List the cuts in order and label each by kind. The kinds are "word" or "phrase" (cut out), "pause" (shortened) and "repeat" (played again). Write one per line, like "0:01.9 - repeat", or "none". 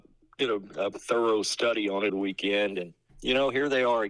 0:00.9 - word
0:02.1 - word
0:03.1 - word